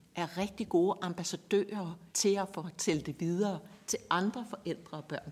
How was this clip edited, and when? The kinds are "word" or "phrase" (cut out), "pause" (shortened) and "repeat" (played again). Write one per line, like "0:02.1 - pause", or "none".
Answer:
0:02.1 - pause

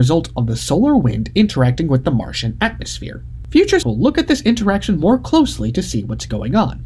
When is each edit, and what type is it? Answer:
0:03.8 - word

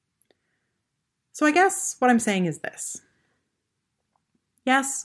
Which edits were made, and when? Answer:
none

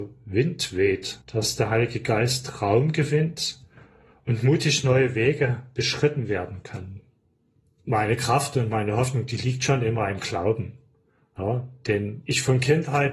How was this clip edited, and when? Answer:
0:01.2 - pause

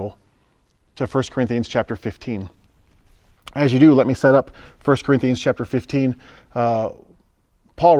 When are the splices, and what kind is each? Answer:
none

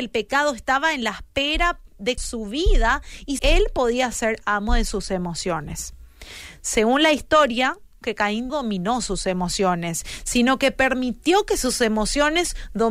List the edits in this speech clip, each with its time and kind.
0:02.2 - word
0:03.4 - word
0:08.0 - word
0:08.5 - word

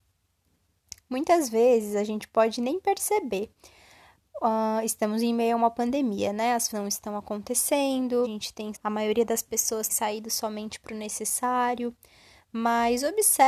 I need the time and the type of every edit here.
0:06.7 - word
0:08.2 - word
0:08.7 - word
0:09.9 - word

